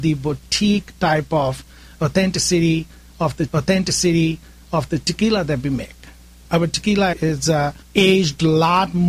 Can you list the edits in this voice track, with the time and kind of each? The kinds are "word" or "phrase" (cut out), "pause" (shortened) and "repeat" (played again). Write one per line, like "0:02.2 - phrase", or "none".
0:03.5 - repeat
0:07.1 - word
0:07.8 - pause